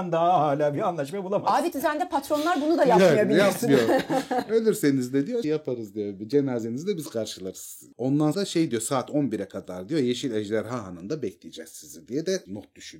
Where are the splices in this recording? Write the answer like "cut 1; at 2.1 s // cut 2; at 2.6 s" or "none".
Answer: cut 1; at 1.7 s // cut 2; at 5.4 s // cut 3; at 8.3 s